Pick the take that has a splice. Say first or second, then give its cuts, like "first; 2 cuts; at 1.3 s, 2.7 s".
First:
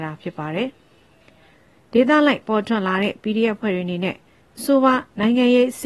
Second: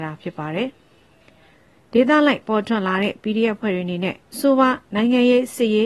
second; 1 cut; at 4.2 s